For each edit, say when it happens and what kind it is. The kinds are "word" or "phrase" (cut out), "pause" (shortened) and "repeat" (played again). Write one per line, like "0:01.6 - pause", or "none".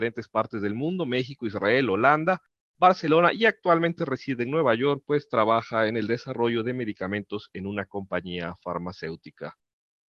none